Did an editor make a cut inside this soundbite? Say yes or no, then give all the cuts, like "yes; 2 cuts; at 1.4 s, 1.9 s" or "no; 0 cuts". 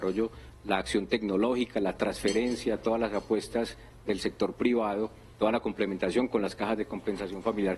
no; 0 cuts